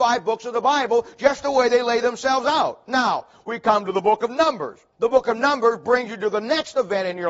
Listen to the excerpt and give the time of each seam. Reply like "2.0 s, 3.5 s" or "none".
4.9 s